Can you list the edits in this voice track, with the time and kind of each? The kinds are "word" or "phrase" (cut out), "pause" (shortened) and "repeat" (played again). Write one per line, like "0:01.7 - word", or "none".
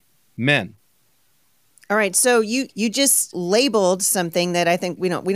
0:02.7 - word
0:03.3 - word

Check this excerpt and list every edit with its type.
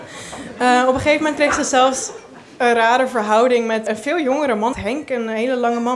0:03.9 - word
0:04.7 - phrase

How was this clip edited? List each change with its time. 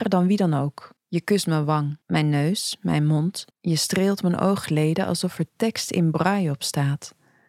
0:01.0 - pause
0:02.0 - pause
0:03.5 - pause

